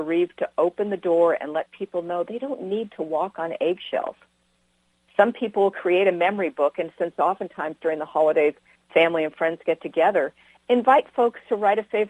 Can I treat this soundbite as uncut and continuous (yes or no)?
yes